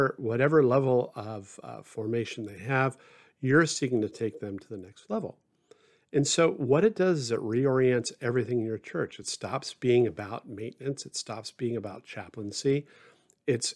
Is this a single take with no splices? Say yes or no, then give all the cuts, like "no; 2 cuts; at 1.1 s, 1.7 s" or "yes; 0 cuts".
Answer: yes; 0 cuts